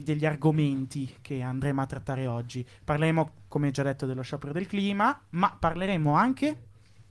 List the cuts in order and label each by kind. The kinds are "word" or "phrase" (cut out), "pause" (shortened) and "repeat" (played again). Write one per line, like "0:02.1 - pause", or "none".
none